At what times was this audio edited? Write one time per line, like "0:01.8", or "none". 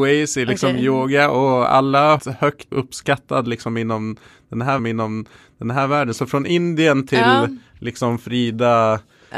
0:02.2
0:02.7
0:04.8
0:07.7